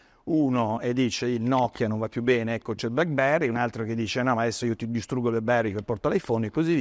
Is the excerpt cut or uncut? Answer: uncut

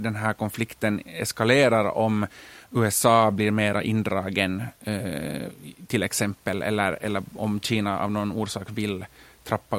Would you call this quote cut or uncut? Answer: uncut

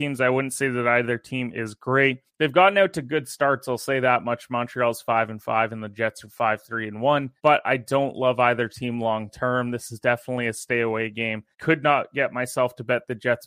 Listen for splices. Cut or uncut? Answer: cut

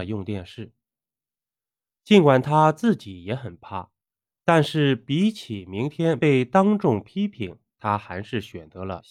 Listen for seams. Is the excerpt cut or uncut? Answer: uncut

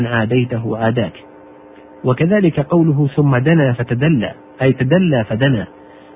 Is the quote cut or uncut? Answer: uncut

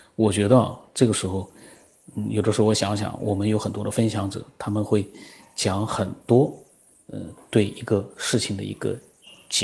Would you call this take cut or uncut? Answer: uncut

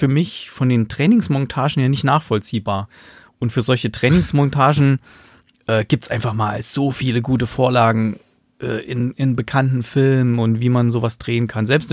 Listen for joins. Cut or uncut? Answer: uncut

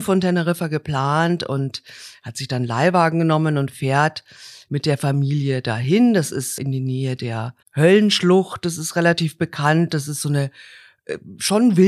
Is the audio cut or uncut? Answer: cut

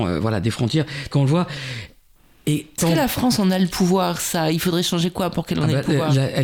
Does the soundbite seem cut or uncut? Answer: cut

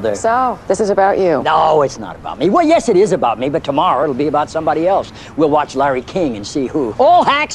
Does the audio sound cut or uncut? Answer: uncut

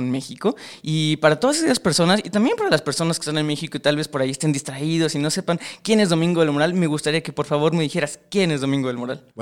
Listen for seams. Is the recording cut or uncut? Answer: uncut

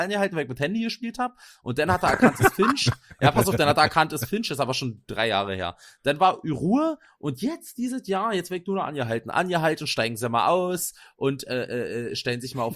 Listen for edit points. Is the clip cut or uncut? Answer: uncut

